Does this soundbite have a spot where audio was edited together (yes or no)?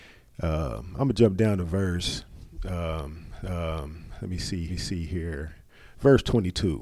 yes